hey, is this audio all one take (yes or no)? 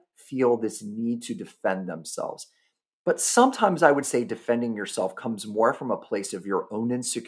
yes